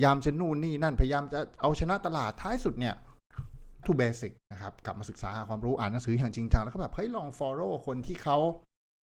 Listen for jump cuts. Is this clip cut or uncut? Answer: cut